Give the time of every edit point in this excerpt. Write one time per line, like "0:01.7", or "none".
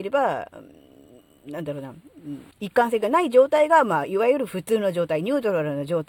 0:02.5